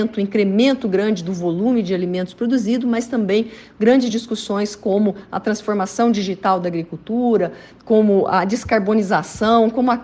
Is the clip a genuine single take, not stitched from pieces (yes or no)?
yes